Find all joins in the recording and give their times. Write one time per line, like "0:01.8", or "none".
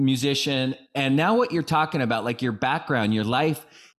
none